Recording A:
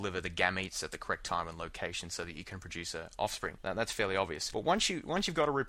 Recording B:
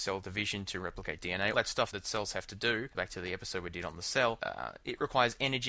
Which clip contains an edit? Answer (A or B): B